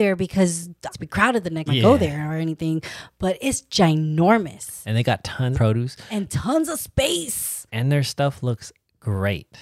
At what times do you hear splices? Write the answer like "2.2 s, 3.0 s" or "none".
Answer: 0.9 s, 1.7 s, 5.5 s, 7.7 s